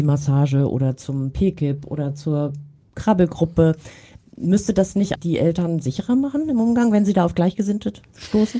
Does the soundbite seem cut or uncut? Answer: cut